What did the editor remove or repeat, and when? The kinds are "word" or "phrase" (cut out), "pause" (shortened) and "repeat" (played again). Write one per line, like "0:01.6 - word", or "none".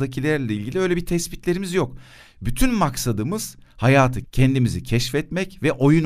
0:04.2 - word